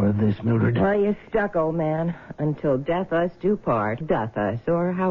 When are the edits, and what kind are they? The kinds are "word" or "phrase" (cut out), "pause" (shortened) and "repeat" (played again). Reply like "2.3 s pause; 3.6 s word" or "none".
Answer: 4.0 s word